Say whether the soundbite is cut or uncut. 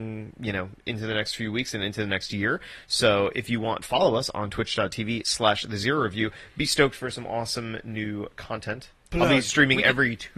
cut